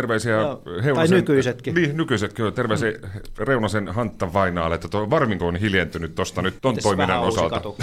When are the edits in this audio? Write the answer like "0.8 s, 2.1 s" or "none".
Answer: 5.4 s, 6.6 s